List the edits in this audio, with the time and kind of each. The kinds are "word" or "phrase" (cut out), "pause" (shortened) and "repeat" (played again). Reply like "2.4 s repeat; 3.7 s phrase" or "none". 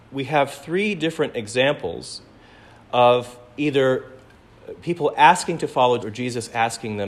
6.0 s word